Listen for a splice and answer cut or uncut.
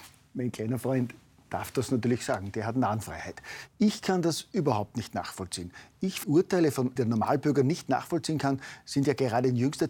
cut